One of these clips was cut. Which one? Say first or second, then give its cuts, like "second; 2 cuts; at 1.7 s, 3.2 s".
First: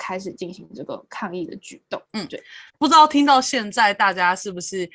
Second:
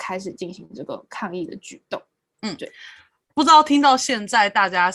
first; 2 cuts; at 2.0 s, 2.7 s